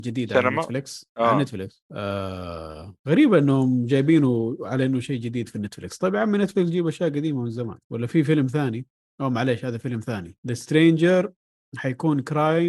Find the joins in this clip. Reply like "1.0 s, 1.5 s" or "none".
none